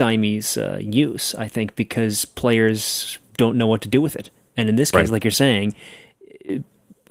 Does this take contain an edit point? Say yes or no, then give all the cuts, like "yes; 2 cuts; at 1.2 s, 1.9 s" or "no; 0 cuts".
no; 0 cuts